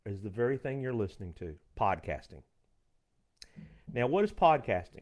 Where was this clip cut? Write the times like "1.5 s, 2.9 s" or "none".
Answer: 1.7 s